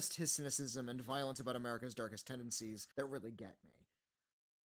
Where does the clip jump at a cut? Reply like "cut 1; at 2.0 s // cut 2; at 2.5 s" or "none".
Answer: cut 1; at 2.9 s